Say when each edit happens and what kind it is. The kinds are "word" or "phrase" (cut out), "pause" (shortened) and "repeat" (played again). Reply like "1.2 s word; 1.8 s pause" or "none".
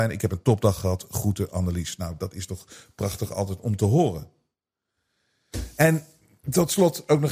none